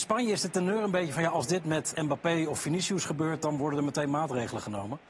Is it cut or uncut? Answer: cut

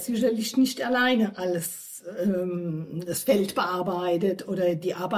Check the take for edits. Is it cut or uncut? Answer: uncut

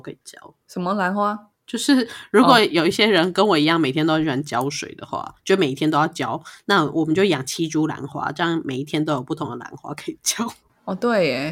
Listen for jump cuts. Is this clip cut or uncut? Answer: uncut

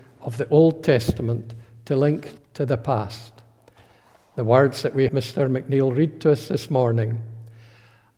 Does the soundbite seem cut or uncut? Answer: cut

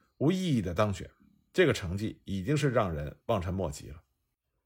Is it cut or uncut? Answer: uncut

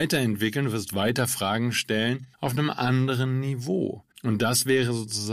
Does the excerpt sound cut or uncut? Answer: cut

